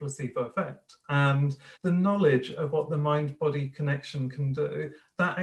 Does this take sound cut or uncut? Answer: cut